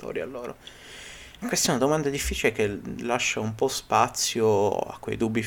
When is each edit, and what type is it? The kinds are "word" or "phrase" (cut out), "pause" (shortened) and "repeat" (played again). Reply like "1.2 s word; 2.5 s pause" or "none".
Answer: none